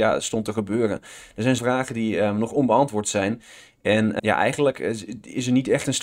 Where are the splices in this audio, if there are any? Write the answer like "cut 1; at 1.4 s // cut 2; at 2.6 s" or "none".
cut 1; at 1.6 s // cut 2; at 4.2 s